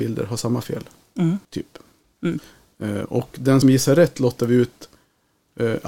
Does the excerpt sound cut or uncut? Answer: cut